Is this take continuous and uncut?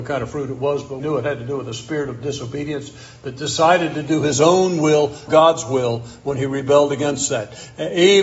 no; 2 cuts; at 1.0 s, 5.3 s

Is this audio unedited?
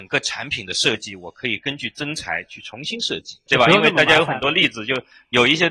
no; 1 cut; at 3.5 s

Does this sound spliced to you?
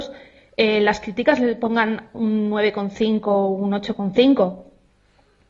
no; 0 cuts

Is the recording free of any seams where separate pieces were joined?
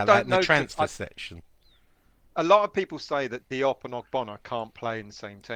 yes; 0 cuts

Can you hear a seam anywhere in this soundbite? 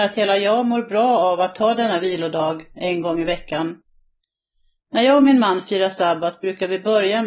no; 0 cuts

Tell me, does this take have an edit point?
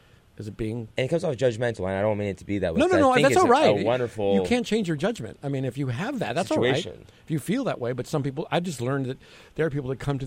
no; 0 cuts

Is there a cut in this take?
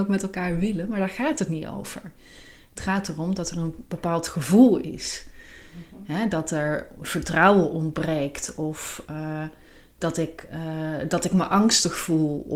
no; 0 cuts

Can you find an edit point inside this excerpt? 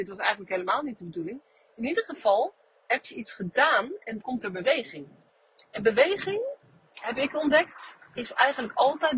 yes; 1 cut; at 4.2 s

